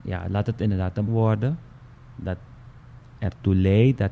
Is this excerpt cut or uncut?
cut